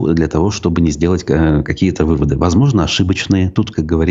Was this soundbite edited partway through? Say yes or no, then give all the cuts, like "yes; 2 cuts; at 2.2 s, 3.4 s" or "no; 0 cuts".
no; 0 cuts